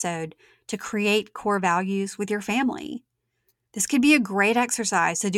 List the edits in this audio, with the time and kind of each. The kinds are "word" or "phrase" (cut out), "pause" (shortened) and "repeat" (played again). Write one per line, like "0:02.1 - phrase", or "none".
none